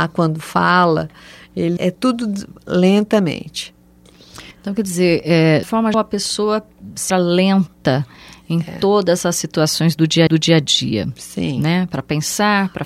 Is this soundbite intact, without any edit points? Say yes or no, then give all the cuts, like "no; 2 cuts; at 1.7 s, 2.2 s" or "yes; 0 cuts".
no; 6 cuts; at 1.8 s, 4.5 s, 5.6 s, 5.9 s, 7.1 s, 10.3 s